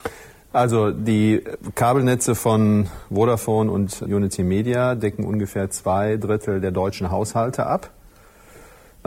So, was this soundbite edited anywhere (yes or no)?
yes